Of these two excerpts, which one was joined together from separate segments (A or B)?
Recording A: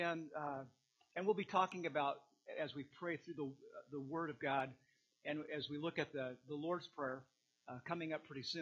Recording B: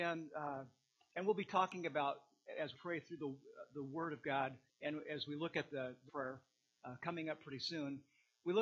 B